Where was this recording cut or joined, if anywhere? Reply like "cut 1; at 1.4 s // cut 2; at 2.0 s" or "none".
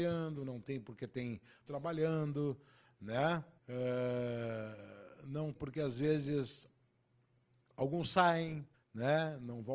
cut 1; at 1.7 s // cut 2; at 3.6 s // cut 3; at 5.5 s // cut 4; at 8.7 s